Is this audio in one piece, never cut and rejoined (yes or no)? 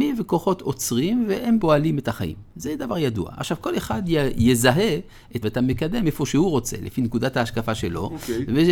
no